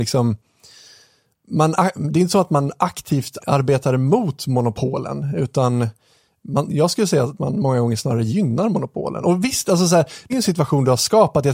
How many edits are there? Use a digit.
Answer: 2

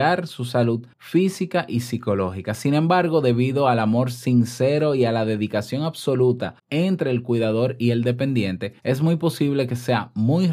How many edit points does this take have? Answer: 3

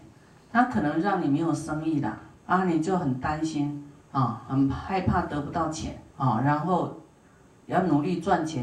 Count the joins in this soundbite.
3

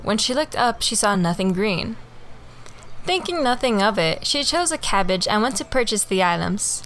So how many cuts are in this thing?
0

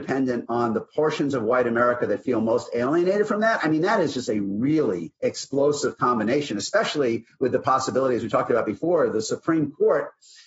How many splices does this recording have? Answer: 1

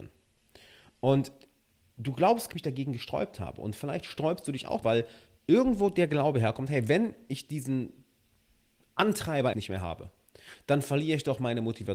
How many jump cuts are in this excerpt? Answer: 3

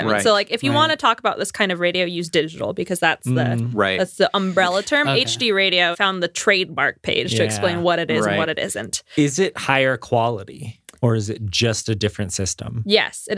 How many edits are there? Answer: 1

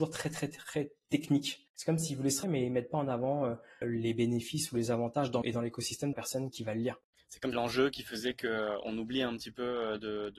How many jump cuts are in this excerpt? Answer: 7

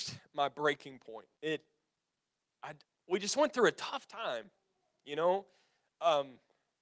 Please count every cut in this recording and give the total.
2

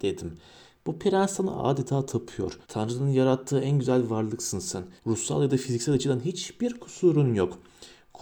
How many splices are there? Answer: 2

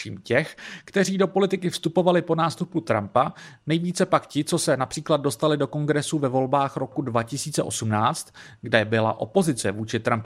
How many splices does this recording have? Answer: 0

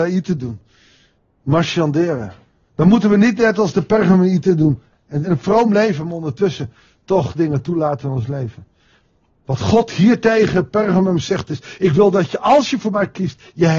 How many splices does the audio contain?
1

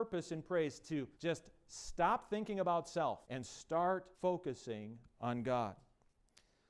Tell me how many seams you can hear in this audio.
3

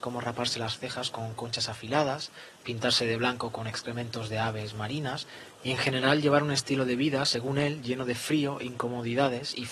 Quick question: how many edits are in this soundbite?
0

